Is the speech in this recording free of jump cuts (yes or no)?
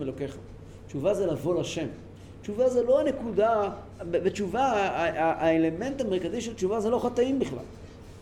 yes